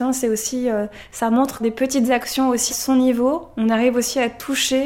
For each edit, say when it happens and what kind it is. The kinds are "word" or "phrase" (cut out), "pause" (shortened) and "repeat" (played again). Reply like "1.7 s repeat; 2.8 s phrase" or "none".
1.6 s phrase; 2.7 s word

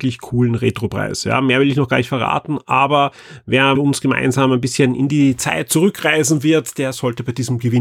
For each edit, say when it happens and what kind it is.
3.7 s word

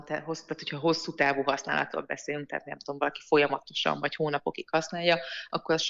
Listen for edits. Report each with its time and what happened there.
none

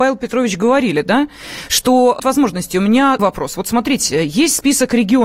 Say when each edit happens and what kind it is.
2.2 s phrase; 3.2 s word

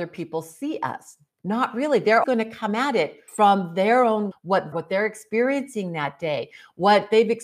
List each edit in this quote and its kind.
2.2 s word; 3.3 s pause; 4.3 s word; 4.7 s phrase

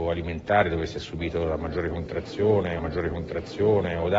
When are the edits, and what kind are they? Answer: 2.8 s repeat

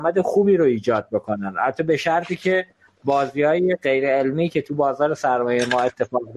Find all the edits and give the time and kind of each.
none

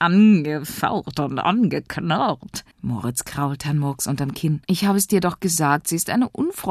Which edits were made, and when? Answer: 2.7 s pause; 4.6 s pause

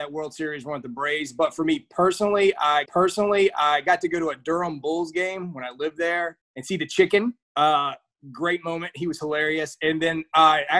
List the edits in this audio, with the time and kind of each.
2.9 s repeat; 6.4 s pause; 7.4 s pause

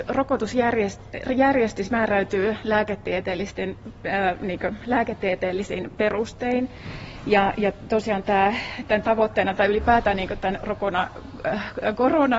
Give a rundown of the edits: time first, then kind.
none

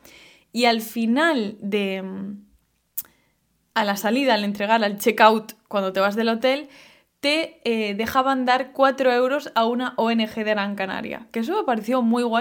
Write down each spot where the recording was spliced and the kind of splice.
none

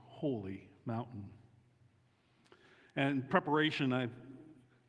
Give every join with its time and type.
3.3 s word

